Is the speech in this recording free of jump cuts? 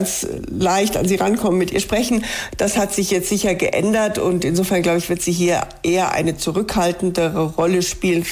yes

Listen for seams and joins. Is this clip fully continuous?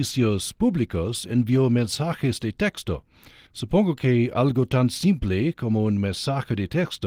no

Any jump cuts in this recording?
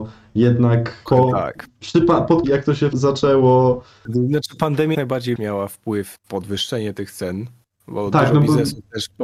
yes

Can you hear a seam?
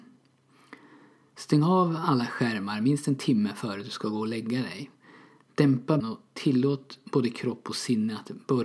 yes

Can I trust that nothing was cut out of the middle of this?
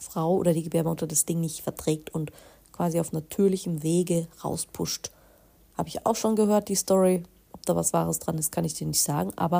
yes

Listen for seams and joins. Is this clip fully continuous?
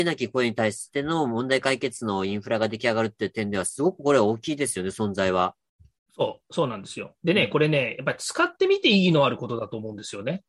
yes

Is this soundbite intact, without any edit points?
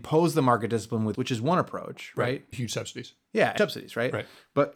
no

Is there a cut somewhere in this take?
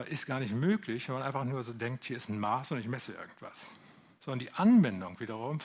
yes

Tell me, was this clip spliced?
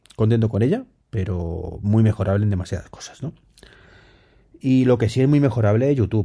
no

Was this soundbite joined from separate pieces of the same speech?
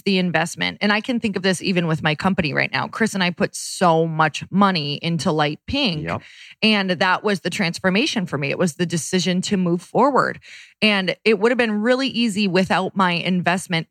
no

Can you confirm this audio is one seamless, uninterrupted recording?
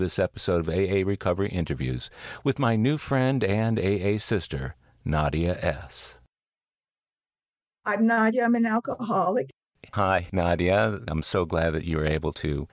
yes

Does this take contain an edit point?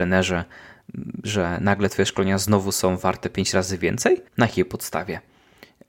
yes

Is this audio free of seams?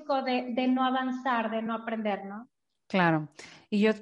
yes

